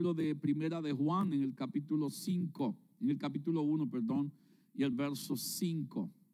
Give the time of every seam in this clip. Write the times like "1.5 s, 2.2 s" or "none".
none

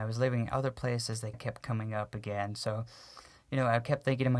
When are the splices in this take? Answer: 1.3 s

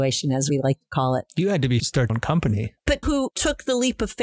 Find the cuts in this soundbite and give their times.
1.8 s, 2.1 s, 3.0 s

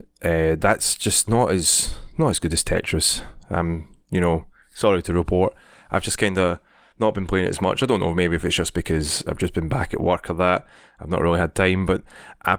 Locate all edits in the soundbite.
none

